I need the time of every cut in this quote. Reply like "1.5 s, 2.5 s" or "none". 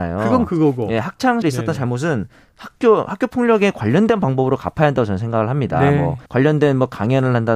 1.4 s, 6.3 s